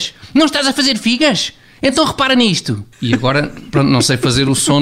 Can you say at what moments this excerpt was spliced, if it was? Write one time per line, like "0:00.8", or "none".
0:02.9